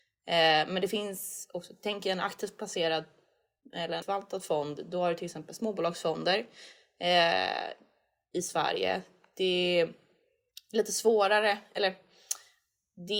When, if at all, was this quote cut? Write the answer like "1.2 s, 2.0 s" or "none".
4.0 s